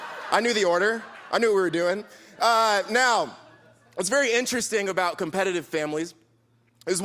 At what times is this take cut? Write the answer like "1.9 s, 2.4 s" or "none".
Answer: none